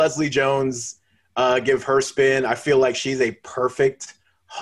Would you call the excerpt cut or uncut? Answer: uncut